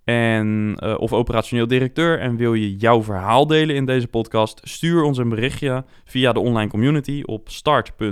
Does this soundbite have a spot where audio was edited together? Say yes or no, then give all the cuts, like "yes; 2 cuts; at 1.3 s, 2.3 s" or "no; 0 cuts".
no; 0 cuts